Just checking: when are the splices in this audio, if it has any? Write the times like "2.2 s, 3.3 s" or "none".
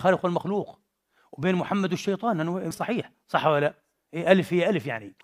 2.7 s